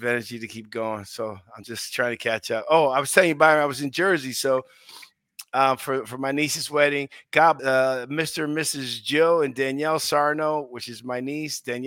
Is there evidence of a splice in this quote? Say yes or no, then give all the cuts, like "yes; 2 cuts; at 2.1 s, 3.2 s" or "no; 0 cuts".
yes; 1 cut; at 7.6 s